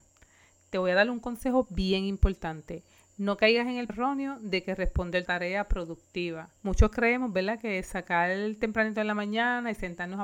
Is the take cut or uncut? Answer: cut